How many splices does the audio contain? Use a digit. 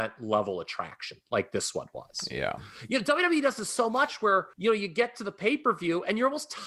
1